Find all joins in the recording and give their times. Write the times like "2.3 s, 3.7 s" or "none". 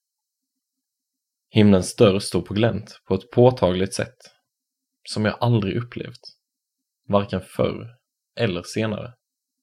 none